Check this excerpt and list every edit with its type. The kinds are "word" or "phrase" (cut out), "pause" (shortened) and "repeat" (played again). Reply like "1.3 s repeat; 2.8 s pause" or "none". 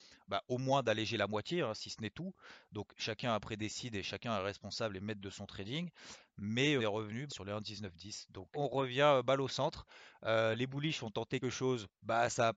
6.8 s word; 7.3 s word; 8.5 s word; 11.4 s word